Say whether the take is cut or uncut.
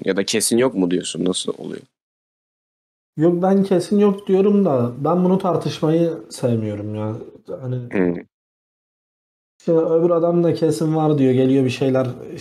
uncut